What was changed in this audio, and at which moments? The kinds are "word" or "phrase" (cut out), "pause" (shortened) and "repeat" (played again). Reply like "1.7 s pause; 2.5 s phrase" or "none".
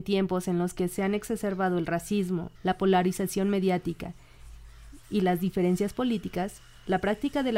2.5 s phrase; 5.0 s pause

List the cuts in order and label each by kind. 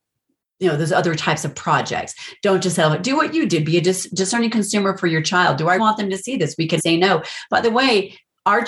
5.8 s word; 6.8 s word

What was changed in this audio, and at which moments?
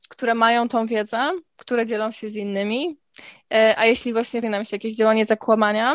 1.5 s pause; 4.4 s word

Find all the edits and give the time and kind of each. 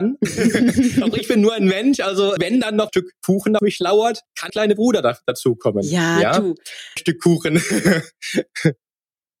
2.4 s word; 2.9 s phrase; 3.6 s word; 4.5 s phrase; 7.0 s word

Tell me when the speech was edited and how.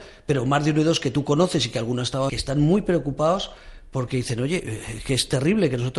2.3 s phrase

